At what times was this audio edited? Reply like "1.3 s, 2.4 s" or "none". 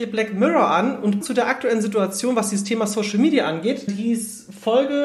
1.2 s, 3.9 s